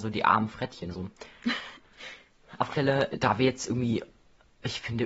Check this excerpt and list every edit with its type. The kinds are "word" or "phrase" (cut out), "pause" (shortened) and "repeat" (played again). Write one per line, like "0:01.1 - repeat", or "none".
0:00.9 - word
0:02.7 - word
0:03.1 - word

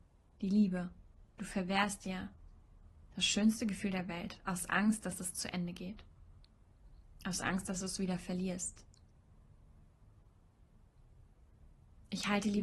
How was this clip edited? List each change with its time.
0:01.3 - pause

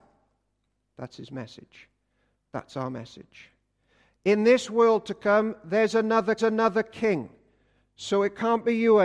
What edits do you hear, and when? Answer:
0:06.4 - repeat

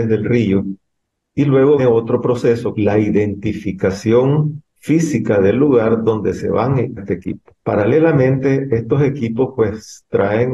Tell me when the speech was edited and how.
0:01.8 - word
0:02.7 - phrase
0:04.7 - pause
0:07.0 - word

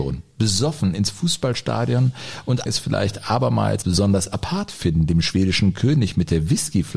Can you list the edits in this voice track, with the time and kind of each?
0:02.7 - phrase
0:03.8 - word

